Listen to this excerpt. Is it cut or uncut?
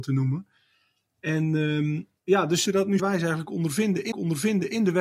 cut